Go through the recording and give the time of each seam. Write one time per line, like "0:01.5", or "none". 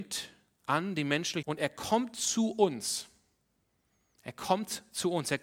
0:01.4